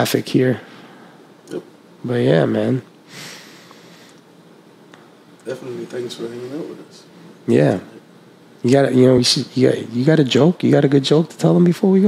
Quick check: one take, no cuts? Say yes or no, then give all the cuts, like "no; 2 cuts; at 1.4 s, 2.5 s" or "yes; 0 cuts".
yes; 0 cuts